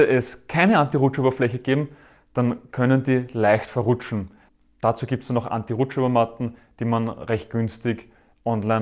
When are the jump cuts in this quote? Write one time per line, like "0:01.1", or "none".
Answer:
none